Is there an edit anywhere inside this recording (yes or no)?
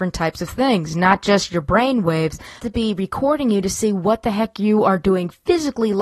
yes